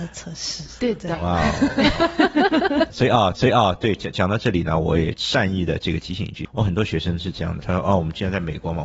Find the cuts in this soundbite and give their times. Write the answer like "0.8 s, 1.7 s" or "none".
3.3 s, 7.6 s